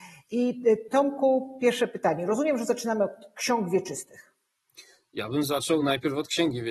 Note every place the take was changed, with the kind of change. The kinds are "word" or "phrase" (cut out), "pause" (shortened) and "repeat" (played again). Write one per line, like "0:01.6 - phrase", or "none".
none